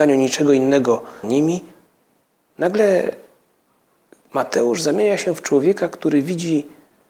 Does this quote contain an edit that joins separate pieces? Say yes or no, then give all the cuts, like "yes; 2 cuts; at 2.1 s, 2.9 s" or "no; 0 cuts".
yes; 1 cut; at 1.2 s